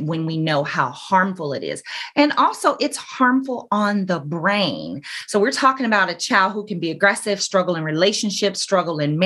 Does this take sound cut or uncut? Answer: uncut